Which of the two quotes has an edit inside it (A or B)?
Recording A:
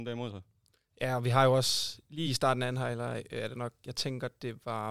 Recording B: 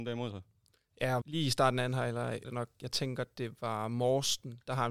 B